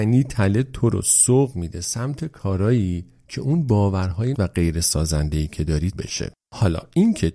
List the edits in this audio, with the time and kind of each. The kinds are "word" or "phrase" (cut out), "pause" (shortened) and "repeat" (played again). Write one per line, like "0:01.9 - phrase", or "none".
0:04.3 - word
0:05.9 - word